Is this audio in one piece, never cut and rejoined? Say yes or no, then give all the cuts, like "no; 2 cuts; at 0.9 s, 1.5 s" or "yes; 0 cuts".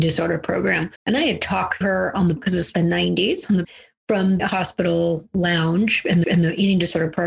no; 7 cuts; at 1.0 s, 1.8 s, 2.4 s, 2.7 s, 3.6 s, 4.4 s, 6.2 s